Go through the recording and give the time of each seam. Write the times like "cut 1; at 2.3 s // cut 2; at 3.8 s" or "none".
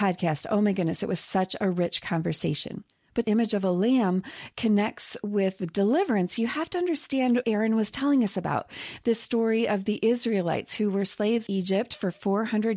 cut 1; at 3.2 s // cut 2; at 7.4 s // cut 3; at 11.5 s

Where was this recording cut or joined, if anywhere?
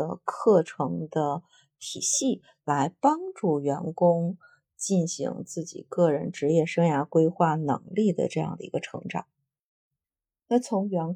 none

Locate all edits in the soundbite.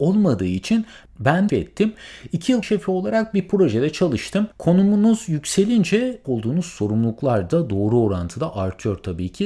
cut 1; at 1.5 s // cut 2; at 2.6 s // cut 3; at 4.5 s // cut 4; at 6.2 s

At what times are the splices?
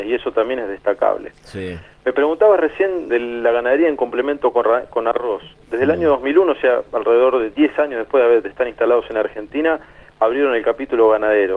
cut 1; at 3.1 s

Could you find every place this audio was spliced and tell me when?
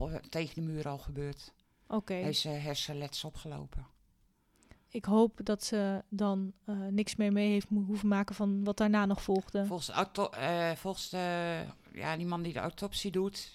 none

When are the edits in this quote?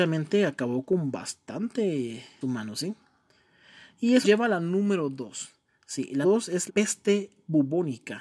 cut 1; at 2.4 s // cut 2; at 4.2 s // cut 3; at 6.2 s // cut 4; at 6.7 s

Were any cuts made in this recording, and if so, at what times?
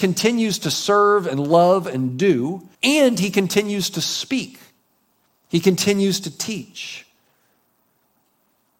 cut 1; at 2.7 s

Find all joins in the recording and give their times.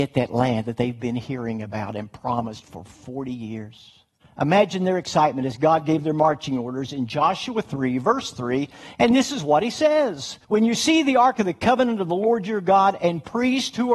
cut 1; at 4.2 s // cut 2; at 10.4 s

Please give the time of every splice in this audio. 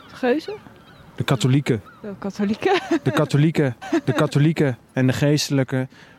cut 1; at 3.8 s

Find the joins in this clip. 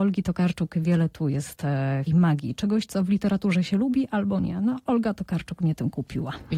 cut 1; at 2.1 s

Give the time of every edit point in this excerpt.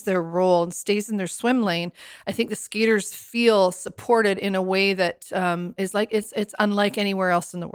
none

